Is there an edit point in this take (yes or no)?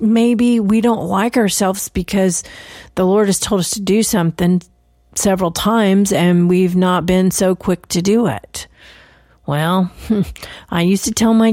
no